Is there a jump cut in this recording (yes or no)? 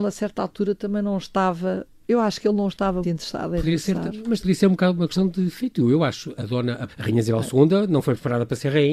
yes